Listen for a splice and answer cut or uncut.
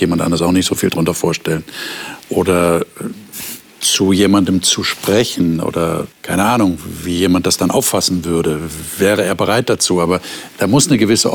cut